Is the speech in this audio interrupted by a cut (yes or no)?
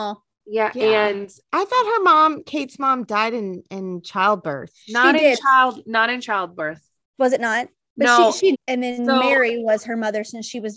yes